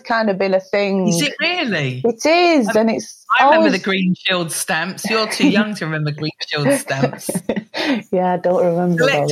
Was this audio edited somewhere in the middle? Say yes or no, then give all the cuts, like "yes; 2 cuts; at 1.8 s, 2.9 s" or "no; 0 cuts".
no; 0 cuts